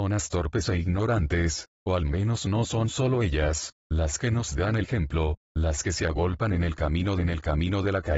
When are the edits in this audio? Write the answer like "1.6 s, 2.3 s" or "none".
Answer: 4.8 s, 7.2 s